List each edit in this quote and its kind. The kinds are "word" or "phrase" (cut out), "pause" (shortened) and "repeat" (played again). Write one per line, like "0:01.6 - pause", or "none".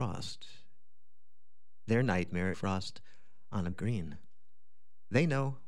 0:02.5 - phrase
0:03.7 - word